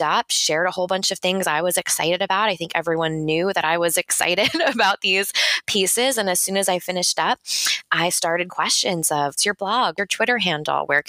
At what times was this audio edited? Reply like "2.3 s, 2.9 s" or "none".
8.5 s, 9.4 s, 10.0 s